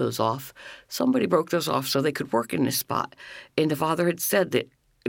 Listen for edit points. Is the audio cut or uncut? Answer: uncut